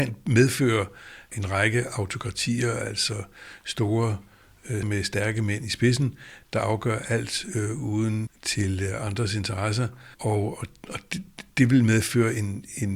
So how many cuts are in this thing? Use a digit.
4